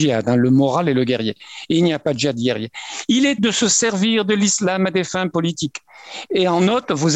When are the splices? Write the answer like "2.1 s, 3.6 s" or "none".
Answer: 3.4 s